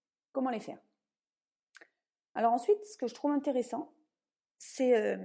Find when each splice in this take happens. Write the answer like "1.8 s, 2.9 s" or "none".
none